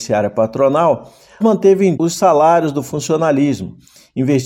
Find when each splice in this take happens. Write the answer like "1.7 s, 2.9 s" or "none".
1.4 s, 2.0 s